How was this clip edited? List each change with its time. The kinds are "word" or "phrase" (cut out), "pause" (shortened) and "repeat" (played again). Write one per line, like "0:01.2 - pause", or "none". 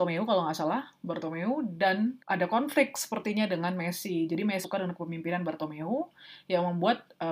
0:02.2 - pause
0:04.6 - word